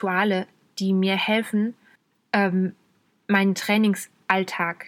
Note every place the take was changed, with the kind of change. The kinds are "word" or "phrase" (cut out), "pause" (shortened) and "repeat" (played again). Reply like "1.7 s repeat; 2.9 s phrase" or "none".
2.0 s pause